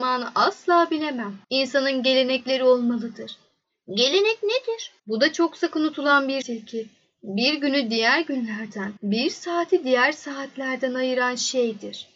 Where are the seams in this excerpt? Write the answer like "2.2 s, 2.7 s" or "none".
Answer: 1.4 s, 5.0 s, 6.4 s, 9.0 s